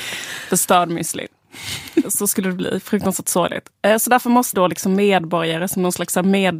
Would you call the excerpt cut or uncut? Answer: cut